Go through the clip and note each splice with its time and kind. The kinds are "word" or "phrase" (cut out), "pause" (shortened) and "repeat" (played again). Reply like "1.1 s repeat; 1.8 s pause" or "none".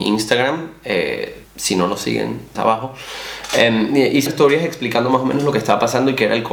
1.4 s word; 2.5 s phrase; 4.3 s word